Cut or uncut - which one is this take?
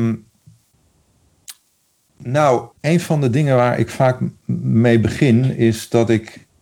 cut